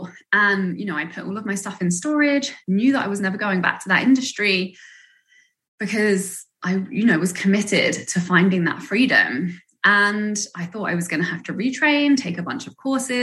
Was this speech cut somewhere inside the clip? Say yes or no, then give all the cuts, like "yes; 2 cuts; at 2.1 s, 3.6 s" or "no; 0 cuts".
no; 0 cuts